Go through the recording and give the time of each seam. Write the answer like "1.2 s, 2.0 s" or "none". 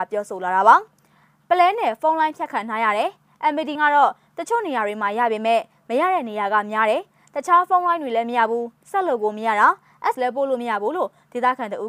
0.9 s, 3.8 s, 10.1 s